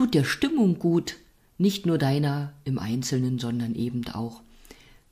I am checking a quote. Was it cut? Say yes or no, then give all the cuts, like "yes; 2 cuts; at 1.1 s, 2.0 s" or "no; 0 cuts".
no; 0 cuts